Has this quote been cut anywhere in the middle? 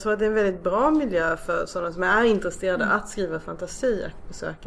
no; 0 cuts

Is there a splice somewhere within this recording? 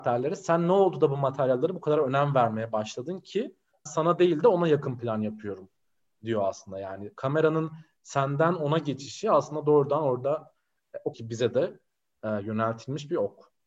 yes; 2 cuts; at 3.9 s, 11.1 s

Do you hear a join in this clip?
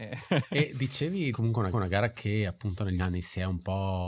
yes; 3 cuts; at 1.3 s, 1.7 s, 3.0 s

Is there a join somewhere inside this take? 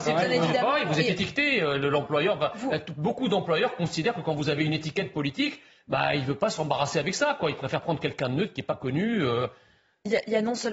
no; 0 cuts

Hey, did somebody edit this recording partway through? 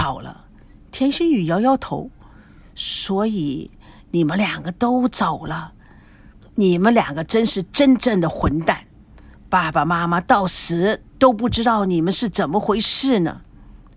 no; 0 cuts

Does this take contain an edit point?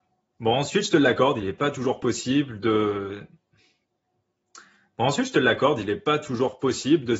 no; 0 cuts

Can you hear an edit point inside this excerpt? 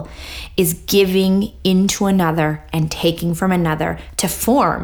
no; 0 cuts

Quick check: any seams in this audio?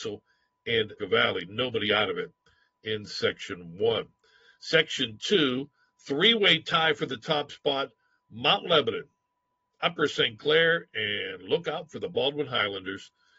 yes; 1 cut; at 1.0 s

